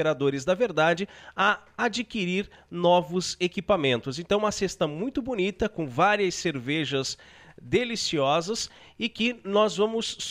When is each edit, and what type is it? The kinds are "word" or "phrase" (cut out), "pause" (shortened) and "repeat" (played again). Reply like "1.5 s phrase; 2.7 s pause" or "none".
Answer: none